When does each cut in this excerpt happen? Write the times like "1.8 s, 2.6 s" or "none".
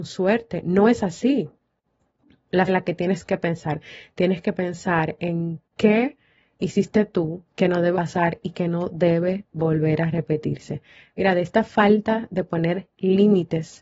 2.7 s, 7.5 s, 7.9 s

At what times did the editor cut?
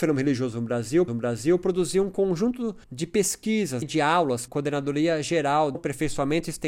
1.1 s, 2.8 s, 3.8 s, 4.5 s, 5.7 s

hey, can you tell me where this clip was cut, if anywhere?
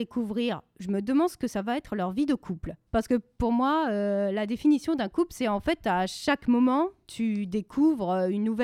2.9 s

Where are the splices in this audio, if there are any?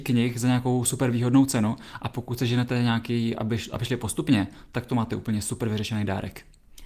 none

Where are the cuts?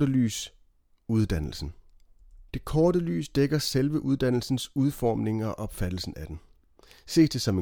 2.5 s

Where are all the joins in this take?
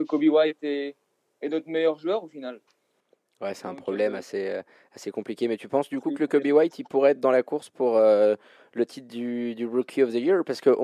none

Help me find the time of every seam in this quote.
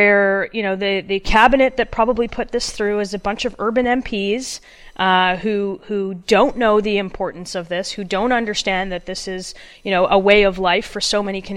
none

